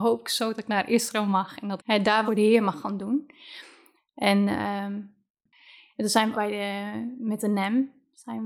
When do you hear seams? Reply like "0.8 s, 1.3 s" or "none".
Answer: 1.8 s, 2.3 s, 6.3 s